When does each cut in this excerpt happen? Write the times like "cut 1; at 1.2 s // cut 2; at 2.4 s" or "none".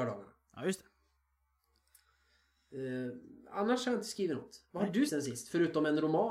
cut 1; at 5.1 s